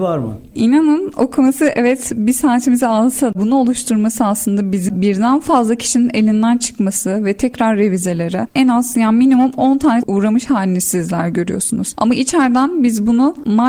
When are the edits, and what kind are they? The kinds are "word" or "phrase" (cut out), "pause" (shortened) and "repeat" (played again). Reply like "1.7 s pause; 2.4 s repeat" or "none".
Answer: 3.3 s word; 4.9 s word; 10.0 s phrase

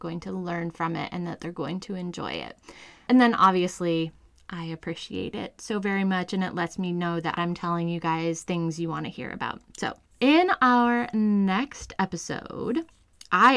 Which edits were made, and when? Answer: none

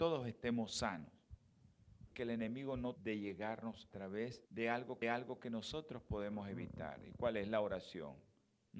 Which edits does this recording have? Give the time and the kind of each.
2.1 s word; 3.0 s word; 3.9 s word; 4.5 s pause; 5.0 s repeat

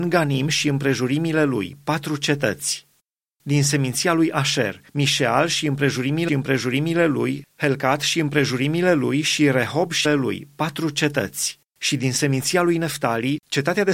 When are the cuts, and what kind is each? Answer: 3.0 s pause; 4.9 s pause; 6.3 s phrase; 10.0 s word; 11.7 s pause

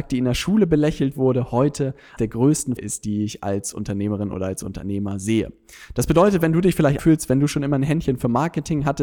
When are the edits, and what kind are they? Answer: 2.2 s word; 2.8 s word; 7.0 s word

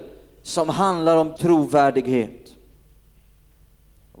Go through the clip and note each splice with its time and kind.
1.4 s word

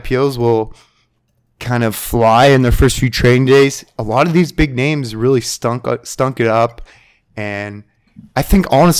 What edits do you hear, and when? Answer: none

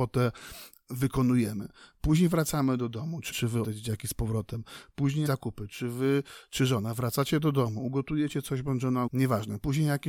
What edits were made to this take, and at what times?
3.3 s word; 3.6 s word; 5.3 s word; 9.1 s word

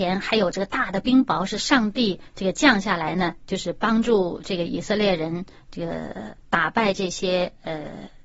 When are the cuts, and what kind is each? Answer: 6.4 s pause

